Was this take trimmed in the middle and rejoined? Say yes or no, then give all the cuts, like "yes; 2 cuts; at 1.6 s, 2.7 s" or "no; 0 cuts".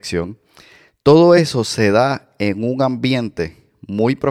no; 0 cuts